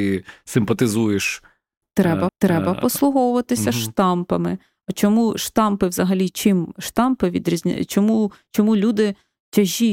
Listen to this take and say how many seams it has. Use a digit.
1